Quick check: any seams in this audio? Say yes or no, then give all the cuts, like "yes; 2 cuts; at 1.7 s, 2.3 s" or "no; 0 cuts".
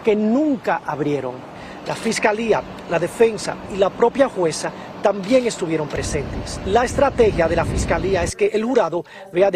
no; 0 cuts